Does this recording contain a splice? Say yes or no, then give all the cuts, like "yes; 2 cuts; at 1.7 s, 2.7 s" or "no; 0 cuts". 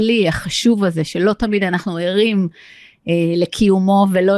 no; 0 cuts